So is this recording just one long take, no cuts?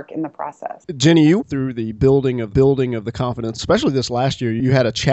no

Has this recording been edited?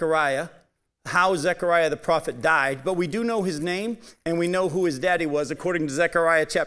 no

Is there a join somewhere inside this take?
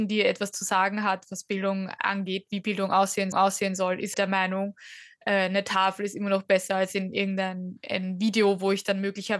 yes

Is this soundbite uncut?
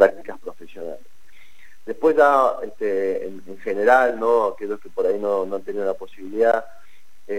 yes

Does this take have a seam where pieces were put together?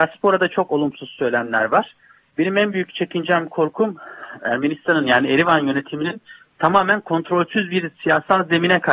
no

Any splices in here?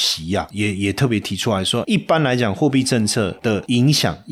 yes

